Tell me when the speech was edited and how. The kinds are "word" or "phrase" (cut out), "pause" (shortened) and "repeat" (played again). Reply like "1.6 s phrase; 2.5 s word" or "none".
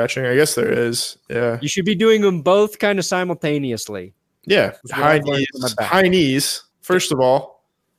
4.8 s pause; 6.7 s pause